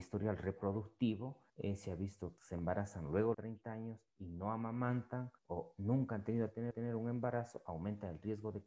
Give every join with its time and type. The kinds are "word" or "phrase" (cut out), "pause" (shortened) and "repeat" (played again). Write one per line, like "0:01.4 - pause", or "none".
0:01.5 - pause
0:02.4 - phrase
0:03.3 - phrase
0:04.1 - pause
0:05.4 - pause
0:06.7 - repeat